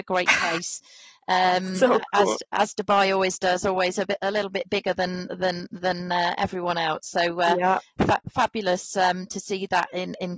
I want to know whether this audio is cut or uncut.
uncut